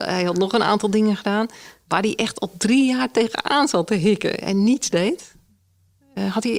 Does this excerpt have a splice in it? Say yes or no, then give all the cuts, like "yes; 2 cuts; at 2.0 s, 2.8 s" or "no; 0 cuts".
no; 0 cuts